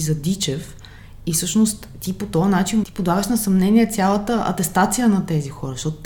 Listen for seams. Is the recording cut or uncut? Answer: cut